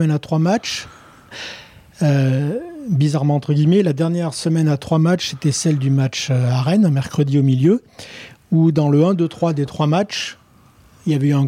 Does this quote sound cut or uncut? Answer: uncut